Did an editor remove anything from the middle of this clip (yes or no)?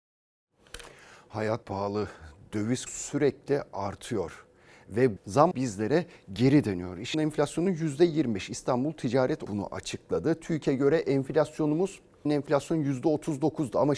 yes